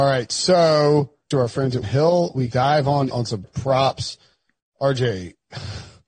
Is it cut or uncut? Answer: cut